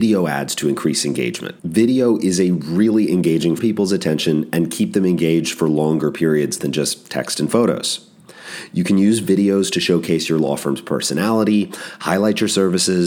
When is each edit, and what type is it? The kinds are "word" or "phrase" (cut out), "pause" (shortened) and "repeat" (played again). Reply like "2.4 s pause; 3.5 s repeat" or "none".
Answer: 1.6 s pause; 3.6 s phrase